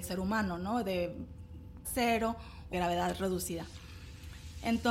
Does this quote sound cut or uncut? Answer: cut